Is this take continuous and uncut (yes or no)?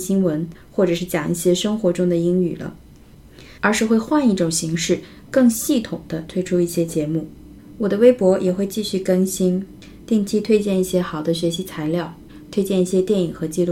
no